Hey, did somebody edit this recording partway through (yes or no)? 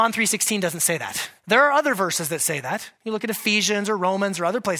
yes